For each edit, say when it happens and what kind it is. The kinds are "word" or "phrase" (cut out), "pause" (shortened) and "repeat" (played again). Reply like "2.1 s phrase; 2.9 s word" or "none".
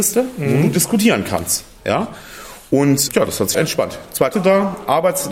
3.1 s word; 3.5 s word; 4.3 s word

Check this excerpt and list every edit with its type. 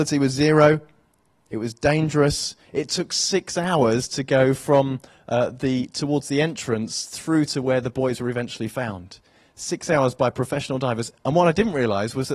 none

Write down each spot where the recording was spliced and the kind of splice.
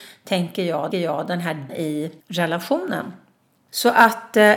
0.9 s repeat; 1.7 s word; 2.2 s pause

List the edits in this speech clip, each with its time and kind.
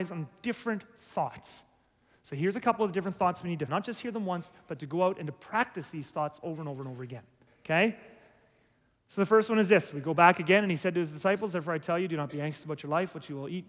3.7 s phrase; 7.5 s pause

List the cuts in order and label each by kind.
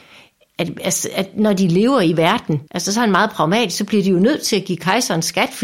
2.7 s pause

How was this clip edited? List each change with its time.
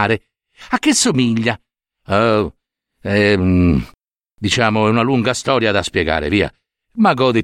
none

